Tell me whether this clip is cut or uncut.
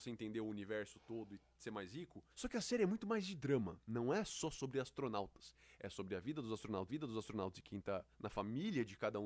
cut